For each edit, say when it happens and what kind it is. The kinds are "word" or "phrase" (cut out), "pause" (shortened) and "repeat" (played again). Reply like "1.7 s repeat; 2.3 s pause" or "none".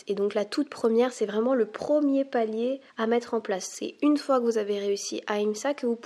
2.9 s pause